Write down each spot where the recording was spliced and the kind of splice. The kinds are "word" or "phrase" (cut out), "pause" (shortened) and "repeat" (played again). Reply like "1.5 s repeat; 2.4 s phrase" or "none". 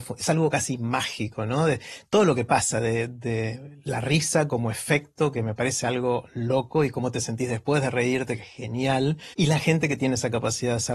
9.3 s pause